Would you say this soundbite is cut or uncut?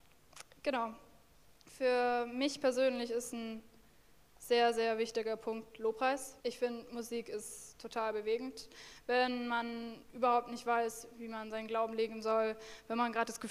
cut